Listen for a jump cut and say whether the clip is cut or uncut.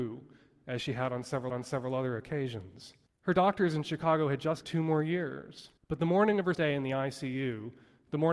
cut